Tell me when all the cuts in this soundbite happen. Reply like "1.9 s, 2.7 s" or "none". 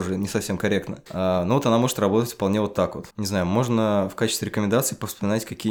1.1 s, 3.1 s